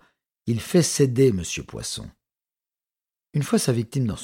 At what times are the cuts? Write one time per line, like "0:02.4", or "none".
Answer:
none